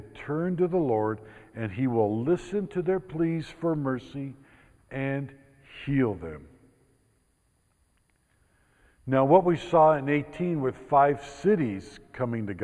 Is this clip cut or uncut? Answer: uncut